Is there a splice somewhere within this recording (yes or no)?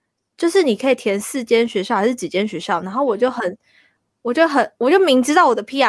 no